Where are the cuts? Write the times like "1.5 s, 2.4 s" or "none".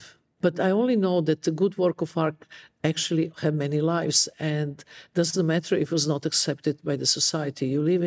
none